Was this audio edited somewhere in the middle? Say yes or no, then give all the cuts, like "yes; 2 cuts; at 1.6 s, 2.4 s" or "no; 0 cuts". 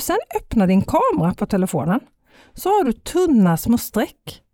no; 0 cuts